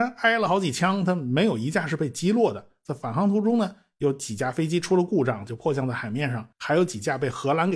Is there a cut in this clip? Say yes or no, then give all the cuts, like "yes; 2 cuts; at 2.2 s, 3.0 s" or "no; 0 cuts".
yes; 1 cut; at 6.5 s